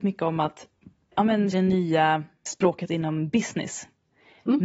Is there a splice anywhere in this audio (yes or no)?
yes